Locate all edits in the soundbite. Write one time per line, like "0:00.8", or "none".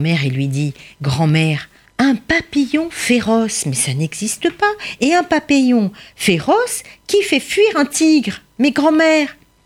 none